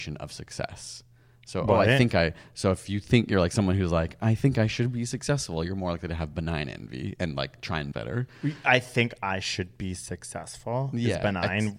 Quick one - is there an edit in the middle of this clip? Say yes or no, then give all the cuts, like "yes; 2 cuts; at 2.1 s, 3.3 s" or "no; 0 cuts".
yes; 1 cut; at 7.9 s